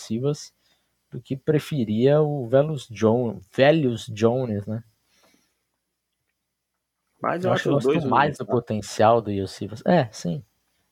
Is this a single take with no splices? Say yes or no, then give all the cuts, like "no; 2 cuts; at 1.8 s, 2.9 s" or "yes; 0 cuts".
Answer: yes; 0 cuts